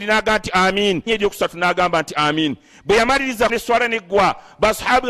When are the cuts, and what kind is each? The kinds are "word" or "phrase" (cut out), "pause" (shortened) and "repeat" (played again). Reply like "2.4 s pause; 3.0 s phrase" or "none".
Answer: 1.1 s word; 3.5 s word